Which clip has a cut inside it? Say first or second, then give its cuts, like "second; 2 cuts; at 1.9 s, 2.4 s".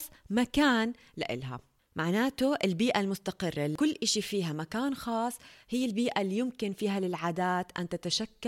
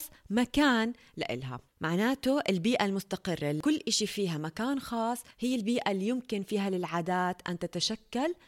second; 2 cuts; at 1.7 s, 5.3 s